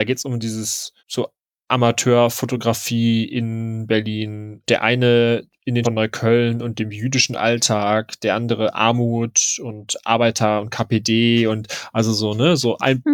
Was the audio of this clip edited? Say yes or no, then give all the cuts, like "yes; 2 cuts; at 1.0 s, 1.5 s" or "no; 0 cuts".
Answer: yes; 2 cuts; at 1.0 s, 5.8 s